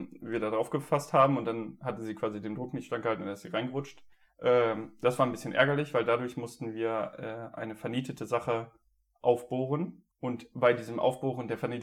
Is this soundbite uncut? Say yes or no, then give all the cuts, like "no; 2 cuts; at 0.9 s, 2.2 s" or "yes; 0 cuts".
no; 2 cuts; at 4.1 s, 10.1 s